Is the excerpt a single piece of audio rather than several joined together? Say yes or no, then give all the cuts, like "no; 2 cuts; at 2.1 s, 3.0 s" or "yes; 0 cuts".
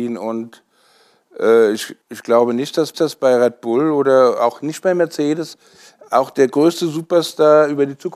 no; 2 cuts; at 2.0 s, 2.9 s